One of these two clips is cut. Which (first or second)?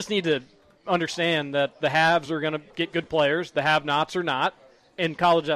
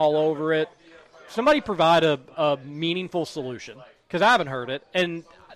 first